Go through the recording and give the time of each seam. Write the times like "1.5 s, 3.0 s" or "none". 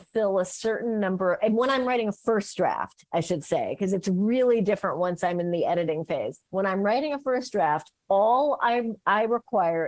6.4 s

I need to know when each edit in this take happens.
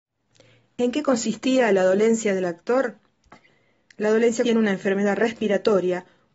4.4 s

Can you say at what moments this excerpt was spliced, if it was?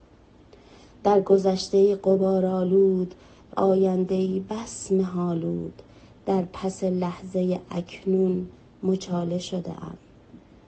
3.5 s

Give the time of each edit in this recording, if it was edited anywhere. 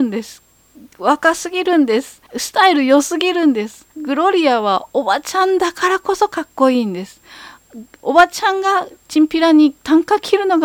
2.3 s, 3.9 s, 9.0 s

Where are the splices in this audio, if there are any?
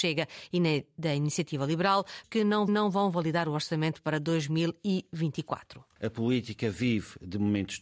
2.2 s, 2.7 s, 5.9 s

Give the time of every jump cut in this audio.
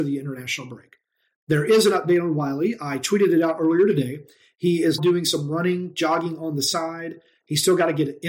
5.0 s

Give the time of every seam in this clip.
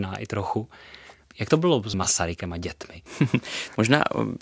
1.9 s, 3.1 s

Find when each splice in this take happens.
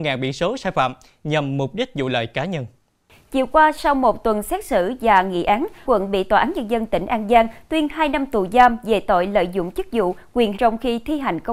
5.9 s, 10.5 s

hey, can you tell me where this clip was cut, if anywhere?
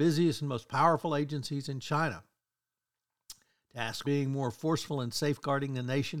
4.0 s

